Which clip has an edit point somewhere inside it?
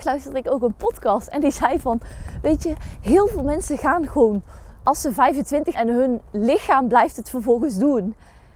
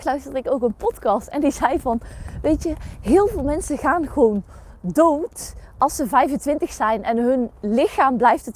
first; 2 cuts; at 4.8 s, 5.7 s

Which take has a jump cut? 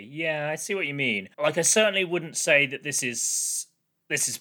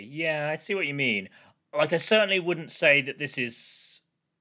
first; 1 cut; at 1.3 s

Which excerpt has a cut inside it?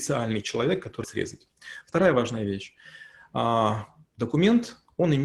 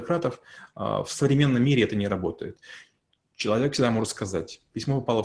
first; 1 cut; at 1.0 s

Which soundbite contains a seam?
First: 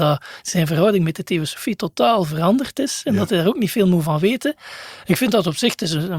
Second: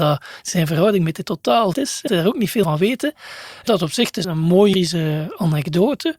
second; 7 cuts; at 1.2 s, 1.7 s, 2.1 s, 2.6 s, 3.7 s, 4.2 s, 4.7 s

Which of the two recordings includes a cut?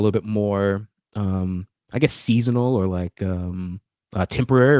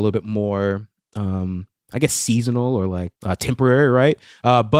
second; 1 cut; at 3.2 s

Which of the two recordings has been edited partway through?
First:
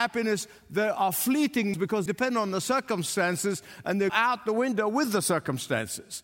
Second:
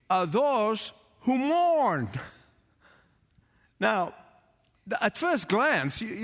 first; 3 cuts; at 1.7 s, 2.1 s, 4.1 s

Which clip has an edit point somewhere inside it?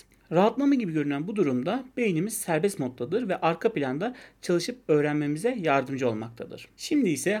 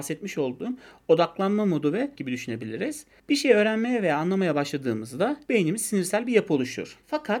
second; 3 cuts; at 2.1 s, 3.2 s, 5.5 s

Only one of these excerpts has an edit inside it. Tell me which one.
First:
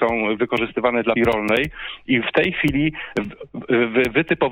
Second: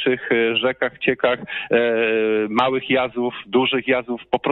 first; 1 cut; at 1.2 s

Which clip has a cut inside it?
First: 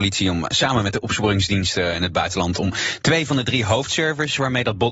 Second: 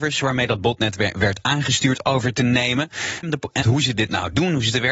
second; 2 cuts; at 3.2 s, 3.6 s

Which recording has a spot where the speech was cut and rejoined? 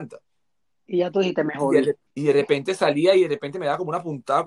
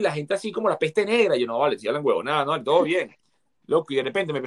first; 1 cut; at 2.1 s

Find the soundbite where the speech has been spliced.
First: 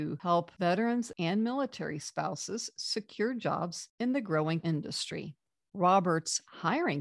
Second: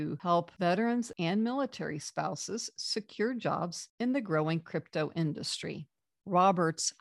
first; 1 cut; at 4.6 s

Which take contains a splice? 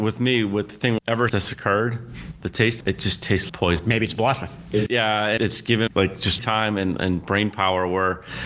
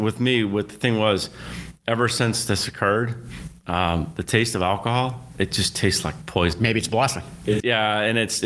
first; 8 cuts; at 1.0 s, 1.3 s, 2.4 s, 2.8 s, 3.5 s, 5.4 s, 5.9 s, 6.4 s

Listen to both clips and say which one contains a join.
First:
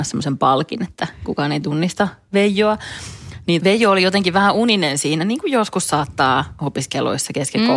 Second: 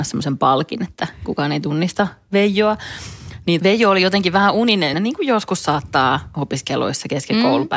second; 1 cut; at 4.9 s

